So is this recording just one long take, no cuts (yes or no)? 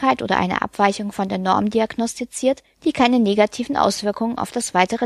no